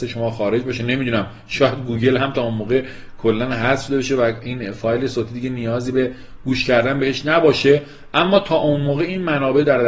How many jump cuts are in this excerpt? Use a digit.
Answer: 0